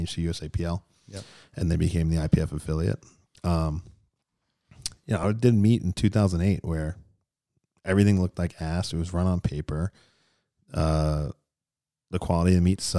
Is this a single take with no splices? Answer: yes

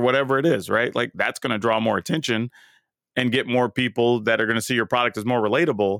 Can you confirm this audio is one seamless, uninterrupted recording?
yes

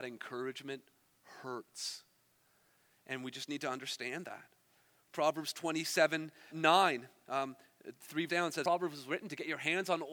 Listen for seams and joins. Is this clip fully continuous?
no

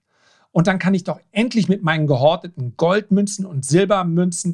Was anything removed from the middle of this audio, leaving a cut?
no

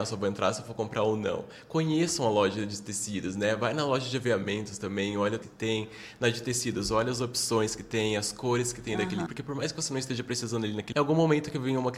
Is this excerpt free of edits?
no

